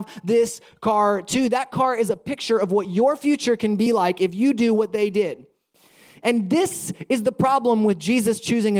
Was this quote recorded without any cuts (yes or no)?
yes